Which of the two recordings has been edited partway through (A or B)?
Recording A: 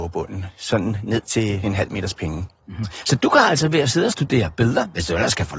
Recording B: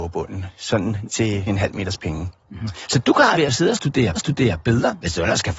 B